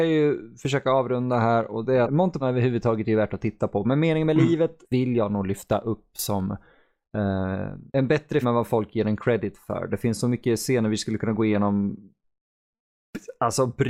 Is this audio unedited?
no; 5 cuts; at 2.0 s, 2.4 s, 4.8 s, 7.9 s, 8.4 s

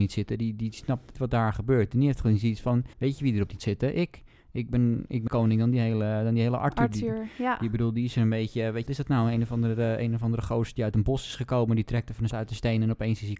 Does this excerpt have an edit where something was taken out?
yes; 6 cuts; at 1.1 s, 2.9 s, 3.6 s, 5.3 s, 8.9 s, 12.3 s

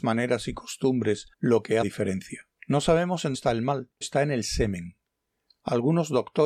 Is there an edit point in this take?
yes; 5 cuts; at 1.3 s, 1.8 s, 2.6 s, 3.3 s, 4.0 s

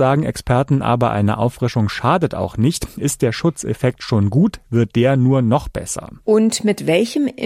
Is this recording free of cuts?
yes; 0 cuts

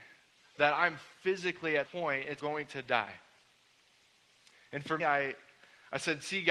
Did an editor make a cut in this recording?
yes; 3 cuts; at 1.8 s, 2.4 s, 5.0 s

